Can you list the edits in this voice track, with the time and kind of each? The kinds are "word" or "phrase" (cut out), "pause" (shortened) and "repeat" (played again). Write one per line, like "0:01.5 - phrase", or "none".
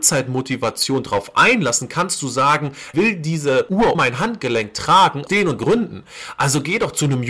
0:02.9 - word
0:03.9 - word
0:05.3 - word
0:05.6 - word